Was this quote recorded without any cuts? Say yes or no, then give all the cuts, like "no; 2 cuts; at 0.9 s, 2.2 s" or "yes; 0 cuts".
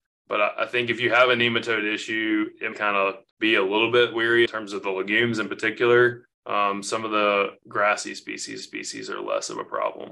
no; 5 cuts; at 2.7 s, 3.3 s, 4.5 s, 6.3 s, 8.6 s